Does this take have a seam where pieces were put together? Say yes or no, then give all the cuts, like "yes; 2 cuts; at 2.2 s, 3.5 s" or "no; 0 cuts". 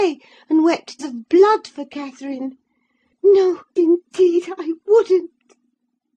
yes; 2 cuts; at 1.0 s, 3.8 s